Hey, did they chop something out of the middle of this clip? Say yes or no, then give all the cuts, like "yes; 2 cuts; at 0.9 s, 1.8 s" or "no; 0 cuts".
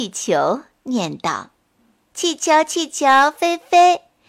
yes; 1 cut; at 1.6 s